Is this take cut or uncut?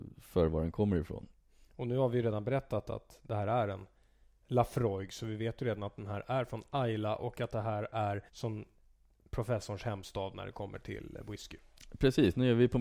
cut